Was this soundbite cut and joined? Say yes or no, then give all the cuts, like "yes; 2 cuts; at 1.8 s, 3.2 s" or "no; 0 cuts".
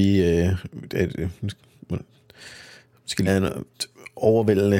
yes; 1 cut; at 3.3 s